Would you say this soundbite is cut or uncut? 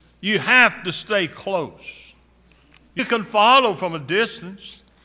cut